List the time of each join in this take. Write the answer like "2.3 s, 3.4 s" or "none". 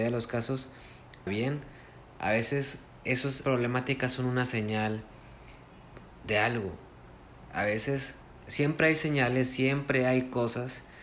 1.3 s, 3.4 s